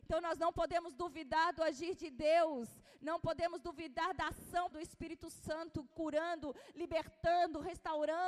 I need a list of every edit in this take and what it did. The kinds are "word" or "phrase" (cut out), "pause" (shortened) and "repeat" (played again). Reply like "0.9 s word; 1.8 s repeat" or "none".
4.7 s word; 5.9 s word